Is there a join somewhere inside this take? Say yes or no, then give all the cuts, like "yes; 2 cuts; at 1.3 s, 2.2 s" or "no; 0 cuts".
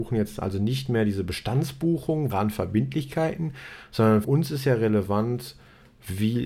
yes; 2 cuts; at 2.3 s, 4.2 s